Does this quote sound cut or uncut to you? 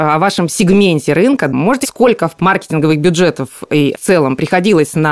cut